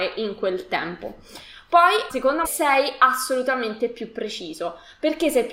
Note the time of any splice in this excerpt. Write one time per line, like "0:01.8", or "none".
0:02.1
0:02.4